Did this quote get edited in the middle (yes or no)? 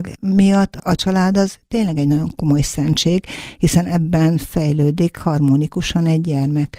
no